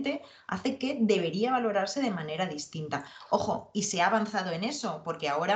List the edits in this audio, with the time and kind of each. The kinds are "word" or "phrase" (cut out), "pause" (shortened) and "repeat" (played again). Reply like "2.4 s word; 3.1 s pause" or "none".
none